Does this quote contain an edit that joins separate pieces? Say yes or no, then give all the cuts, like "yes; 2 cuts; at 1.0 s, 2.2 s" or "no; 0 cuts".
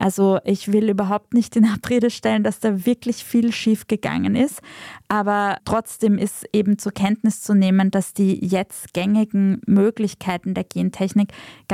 no; 0 cuts